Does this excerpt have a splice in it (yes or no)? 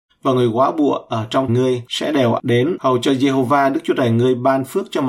yes